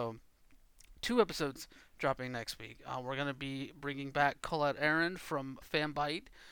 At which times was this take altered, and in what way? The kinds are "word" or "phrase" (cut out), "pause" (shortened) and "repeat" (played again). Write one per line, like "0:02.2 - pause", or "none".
0:05.6 - word